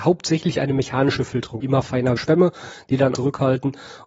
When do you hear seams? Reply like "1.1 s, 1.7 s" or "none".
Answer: 1.6 s, 2.2 s, 3.1 s